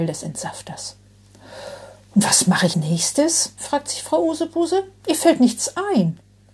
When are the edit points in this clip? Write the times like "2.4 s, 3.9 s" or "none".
2.7 s

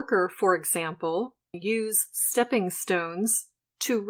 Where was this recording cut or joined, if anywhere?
1.5 s

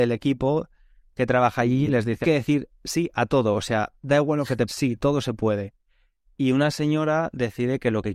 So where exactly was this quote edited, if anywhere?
2.2 s, 4.7 s

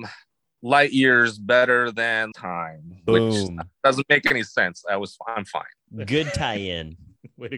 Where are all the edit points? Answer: 2.3 s

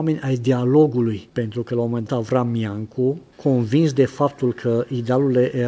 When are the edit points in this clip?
2.1 s

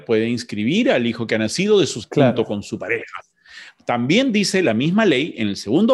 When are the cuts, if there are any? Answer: 2.0 s

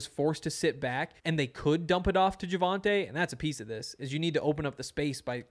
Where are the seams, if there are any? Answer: 1.2 s

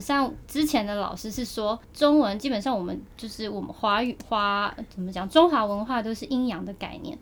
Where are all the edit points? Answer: 1.8 s

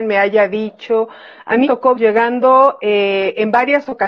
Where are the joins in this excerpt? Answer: 1.6 s, 1.9 s

